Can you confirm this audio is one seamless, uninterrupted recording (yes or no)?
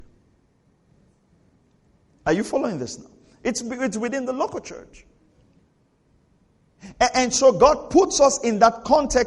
yes